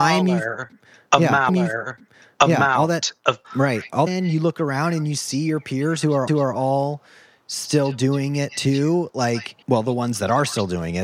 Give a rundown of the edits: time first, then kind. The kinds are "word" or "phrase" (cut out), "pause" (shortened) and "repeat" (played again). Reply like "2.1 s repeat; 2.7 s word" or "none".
1.5 s repeat; 3.4 s word; 4.1 s phrase; 6.3 s repeat; 9.6 s pause